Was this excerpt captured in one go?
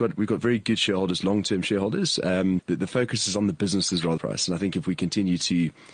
no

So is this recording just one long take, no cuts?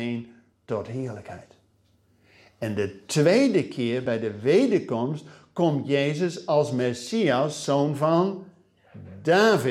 yes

